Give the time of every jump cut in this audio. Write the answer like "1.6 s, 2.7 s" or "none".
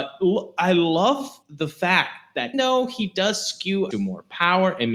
1.4 s, 2.5 s, 3.9 s